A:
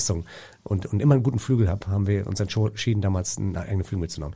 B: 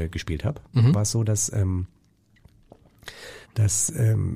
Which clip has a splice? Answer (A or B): B